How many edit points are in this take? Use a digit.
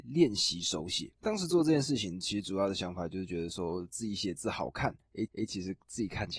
2